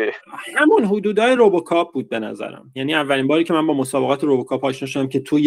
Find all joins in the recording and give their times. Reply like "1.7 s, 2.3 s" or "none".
none